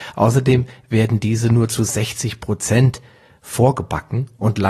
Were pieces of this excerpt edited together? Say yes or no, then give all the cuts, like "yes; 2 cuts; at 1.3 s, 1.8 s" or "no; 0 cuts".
no; 0 cuts